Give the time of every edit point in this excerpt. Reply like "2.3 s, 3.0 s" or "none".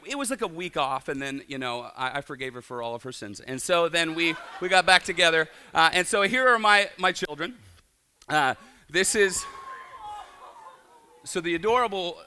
none